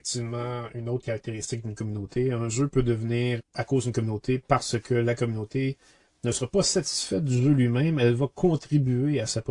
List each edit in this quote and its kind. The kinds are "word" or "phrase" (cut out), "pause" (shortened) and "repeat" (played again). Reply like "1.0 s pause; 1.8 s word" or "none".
3.4 s word